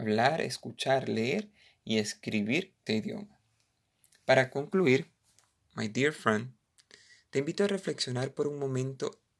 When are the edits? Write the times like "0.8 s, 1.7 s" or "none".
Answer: 2.9 s